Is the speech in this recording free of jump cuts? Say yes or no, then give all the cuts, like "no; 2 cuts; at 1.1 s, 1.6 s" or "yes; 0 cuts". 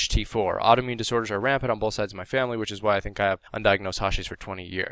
no; 1 cut; at 3.5 s